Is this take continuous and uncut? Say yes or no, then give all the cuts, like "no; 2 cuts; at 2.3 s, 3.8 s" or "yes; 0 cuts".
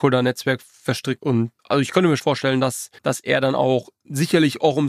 no; 4 cuts; at 1.2 s, 1.6 s, 2.2 s, 3.0 s